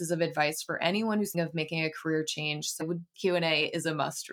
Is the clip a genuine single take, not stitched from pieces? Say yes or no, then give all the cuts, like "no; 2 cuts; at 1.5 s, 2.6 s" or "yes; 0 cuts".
no; 3 cuts; at 1.3 s, 2.8 s, 3.1 s